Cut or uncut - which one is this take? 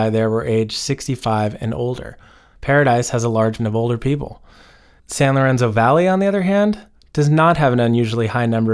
cut